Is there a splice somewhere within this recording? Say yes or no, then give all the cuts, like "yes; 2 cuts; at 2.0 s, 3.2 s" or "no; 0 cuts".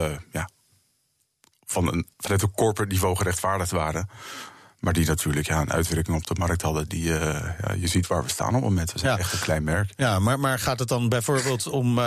yes; 1 cut; at 2.1 s